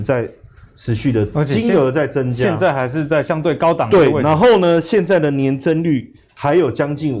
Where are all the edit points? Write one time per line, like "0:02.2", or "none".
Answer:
none